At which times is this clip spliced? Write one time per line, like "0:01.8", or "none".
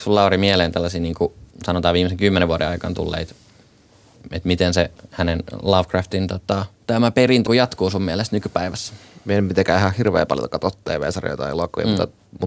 0:01.5
0:06.8
0:07.5